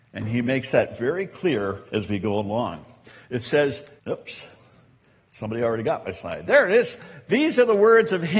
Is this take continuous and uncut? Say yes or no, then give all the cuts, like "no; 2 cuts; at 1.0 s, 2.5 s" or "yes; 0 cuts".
no; 2 cuts; at 1.9 s, 4.0 s